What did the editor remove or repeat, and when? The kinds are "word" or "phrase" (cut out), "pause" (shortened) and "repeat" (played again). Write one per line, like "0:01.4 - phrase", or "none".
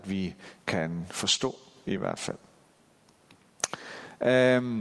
none

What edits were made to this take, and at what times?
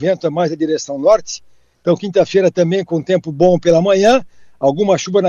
none

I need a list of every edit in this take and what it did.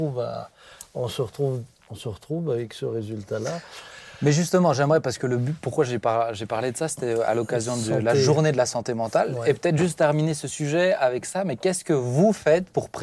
none

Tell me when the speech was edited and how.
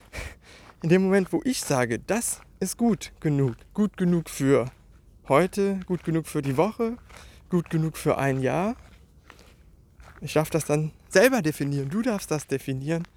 0:03.6 - pause
0:04.9 - pause

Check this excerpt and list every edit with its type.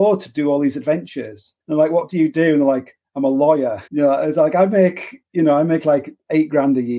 0:01.6 - pause
0:03.9 - pause

